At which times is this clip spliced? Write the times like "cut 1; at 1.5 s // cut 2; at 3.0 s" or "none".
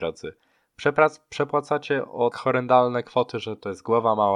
cut 1; at 2.3 s